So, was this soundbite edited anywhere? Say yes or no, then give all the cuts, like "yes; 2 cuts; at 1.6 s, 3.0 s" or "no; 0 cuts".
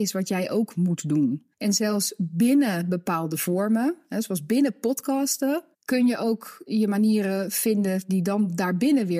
yes; 2 cuts; at 1.5 s, 5.7 s